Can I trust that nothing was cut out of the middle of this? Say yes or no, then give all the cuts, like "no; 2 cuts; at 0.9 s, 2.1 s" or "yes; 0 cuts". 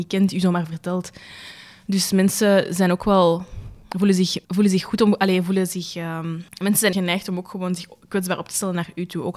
no; 4 cuts; at 3.8 s, 4.4 s, 6.5 s, 6.9 s